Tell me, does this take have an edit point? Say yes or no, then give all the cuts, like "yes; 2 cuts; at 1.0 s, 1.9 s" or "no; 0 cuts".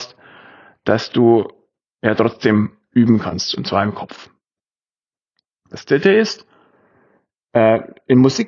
no; 0 cuts